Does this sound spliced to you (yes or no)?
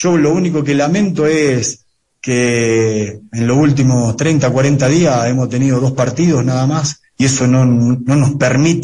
no